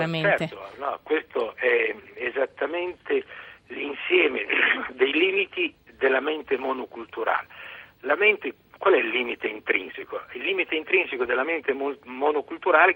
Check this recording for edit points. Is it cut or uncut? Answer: uncut